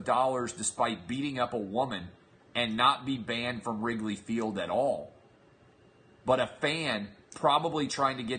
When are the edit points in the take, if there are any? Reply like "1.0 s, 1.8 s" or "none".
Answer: none